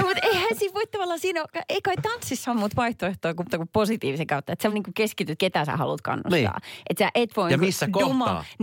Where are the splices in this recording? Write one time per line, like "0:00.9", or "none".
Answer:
0:02.5
0:03.5
0:04.7
0:05.4